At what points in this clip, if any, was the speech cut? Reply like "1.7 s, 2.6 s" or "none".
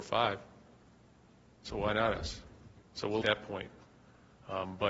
2.8 s, 3.2 s